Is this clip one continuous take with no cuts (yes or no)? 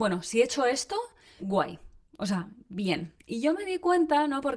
no